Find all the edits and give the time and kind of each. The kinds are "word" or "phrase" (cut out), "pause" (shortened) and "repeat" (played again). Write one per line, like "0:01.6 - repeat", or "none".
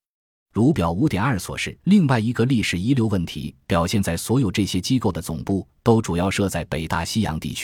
0:01.8 - pause